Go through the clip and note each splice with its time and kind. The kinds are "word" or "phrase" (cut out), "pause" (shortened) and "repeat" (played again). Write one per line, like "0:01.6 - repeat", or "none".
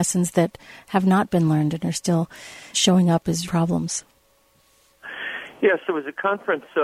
0:02.7 - word
0:03.4 - word